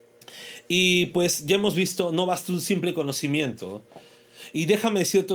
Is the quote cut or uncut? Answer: uncut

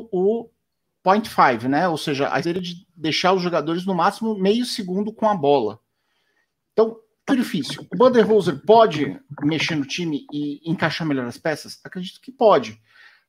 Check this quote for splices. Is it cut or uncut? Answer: cut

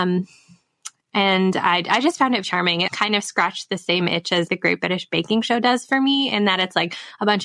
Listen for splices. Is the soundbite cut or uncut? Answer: cut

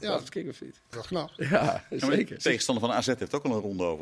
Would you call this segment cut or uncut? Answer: cut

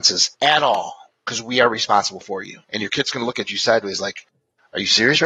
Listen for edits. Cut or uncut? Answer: cut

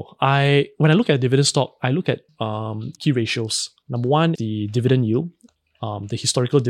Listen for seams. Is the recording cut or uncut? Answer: cut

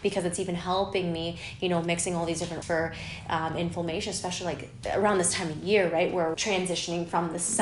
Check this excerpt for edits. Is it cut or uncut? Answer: cut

